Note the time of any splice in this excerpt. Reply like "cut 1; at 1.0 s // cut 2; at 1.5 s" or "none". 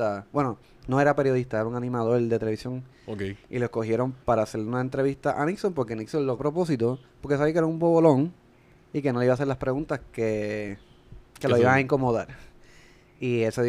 cut 1; at 4.2 s // cut 2; at 6.4 s // cut 3; at 7.1 s // cut 4; at 11.3 s